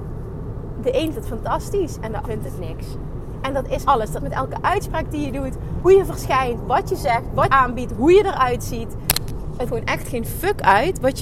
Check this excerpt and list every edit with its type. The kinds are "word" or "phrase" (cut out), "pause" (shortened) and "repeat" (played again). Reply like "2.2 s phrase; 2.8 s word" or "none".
1.1 s word; 2.2 s word; 3.9 s word; 4.2 s word; 5.8 s word; 7.5 s word; 9.7 s word